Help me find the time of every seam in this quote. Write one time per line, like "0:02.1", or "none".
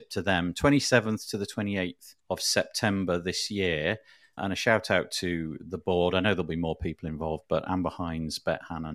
0:02.2
0:04.4